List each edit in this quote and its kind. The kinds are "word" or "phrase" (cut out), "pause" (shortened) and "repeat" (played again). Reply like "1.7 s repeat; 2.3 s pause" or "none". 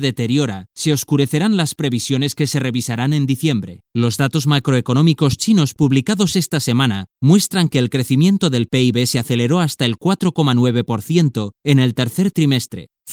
3.8 s pause